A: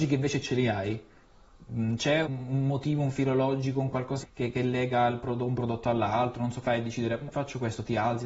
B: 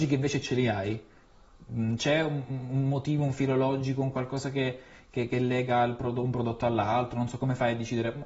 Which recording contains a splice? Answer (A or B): A